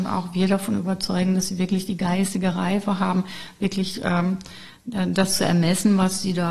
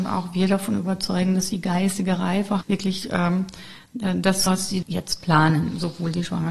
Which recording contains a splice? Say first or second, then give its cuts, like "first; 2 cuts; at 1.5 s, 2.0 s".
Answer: second; 4 cuts; at 1.5 s, 2.6 s, 4.5 s, 4.8 s